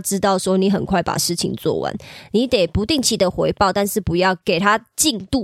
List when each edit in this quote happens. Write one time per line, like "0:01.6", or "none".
0:04.4